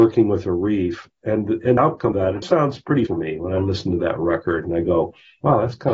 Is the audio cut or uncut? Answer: cut